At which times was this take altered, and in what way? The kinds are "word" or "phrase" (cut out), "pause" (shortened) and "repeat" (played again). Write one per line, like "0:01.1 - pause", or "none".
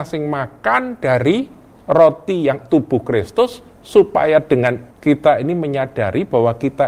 0:02.6 - word
0:04.9 - word